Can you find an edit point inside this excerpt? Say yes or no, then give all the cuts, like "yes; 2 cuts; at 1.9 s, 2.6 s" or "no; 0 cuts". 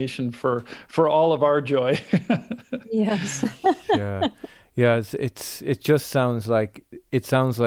no; 0 cuts